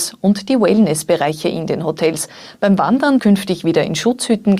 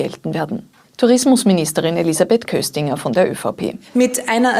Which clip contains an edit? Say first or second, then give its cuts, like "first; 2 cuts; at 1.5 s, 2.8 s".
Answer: first; 1 cut; at 3.2 s